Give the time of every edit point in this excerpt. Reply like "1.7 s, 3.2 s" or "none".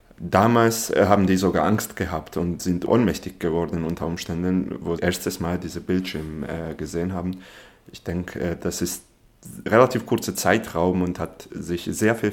5.0 s